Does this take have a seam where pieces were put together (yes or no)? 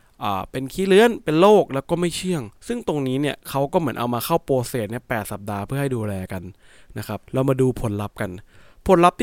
yes